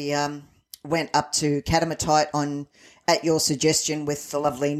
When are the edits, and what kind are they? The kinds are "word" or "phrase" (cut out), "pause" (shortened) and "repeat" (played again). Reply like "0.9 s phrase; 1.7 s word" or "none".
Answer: none